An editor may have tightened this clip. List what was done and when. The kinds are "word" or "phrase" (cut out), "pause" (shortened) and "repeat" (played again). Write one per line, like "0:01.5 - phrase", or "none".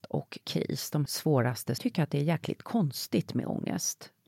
0:01.1 - word
0:01.8 - phrase